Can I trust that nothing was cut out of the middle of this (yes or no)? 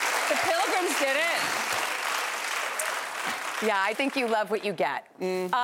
no